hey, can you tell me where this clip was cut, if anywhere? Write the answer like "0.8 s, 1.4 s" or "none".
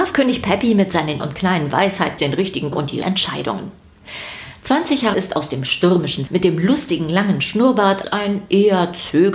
1.2 s, 2.2 s, 2.7 s, 3.0 s, 5.1 s, 6.3 s, 8.0 s